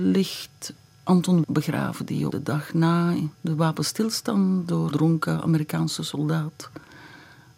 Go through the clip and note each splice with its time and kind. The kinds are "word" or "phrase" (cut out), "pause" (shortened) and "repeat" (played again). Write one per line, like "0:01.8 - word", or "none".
0:01.4 - word
0:02.3 - word
0:03.3 - pause
0:04.9 - word